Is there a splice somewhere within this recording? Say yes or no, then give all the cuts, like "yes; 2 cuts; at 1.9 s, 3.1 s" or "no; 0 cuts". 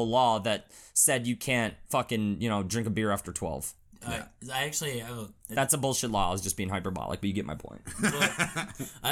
no; 0 cuts